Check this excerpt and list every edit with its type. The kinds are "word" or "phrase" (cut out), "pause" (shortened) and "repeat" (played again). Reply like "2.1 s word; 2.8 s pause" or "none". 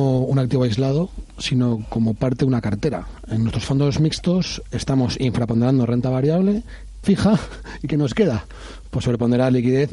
7.0 s phrase